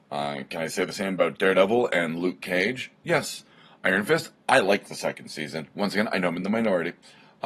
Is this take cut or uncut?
uncut